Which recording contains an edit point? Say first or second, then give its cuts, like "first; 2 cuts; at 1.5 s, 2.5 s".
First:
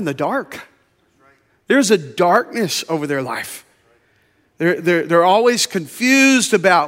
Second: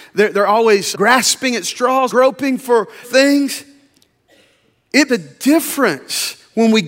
second; 4 cuts; at 0.9 s, 2.1 s, 3.0 s, 5.1 s